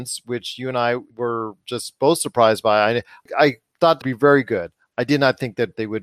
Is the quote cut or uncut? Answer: cut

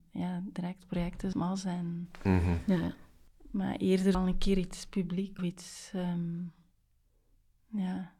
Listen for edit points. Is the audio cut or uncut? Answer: cut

